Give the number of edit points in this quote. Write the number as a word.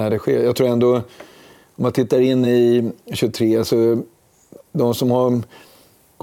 zero